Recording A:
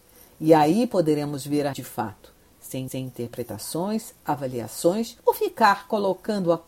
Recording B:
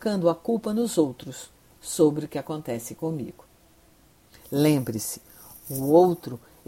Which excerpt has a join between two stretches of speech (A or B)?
A